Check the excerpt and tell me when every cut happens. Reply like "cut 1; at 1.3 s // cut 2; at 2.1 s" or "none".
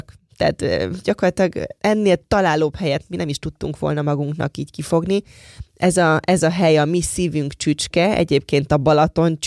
cut 1; at 1.8 s